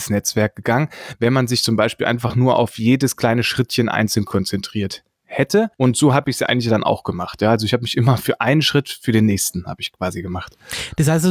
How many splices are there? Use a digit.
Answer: 1